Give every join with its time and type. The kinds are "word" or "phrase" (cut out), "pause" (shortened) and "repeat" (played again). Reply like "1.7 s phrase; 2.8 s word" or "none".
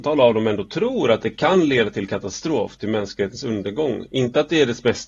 none